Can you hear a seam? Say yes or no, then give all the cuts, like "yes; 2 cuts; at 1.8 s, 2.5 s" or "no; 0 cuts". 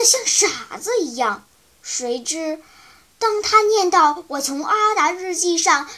no; 0 cuts